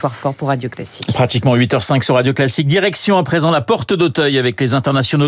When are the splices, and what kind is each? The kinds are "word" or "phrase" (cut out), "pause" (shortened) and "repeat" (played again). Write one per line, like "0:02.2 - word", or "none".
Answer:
none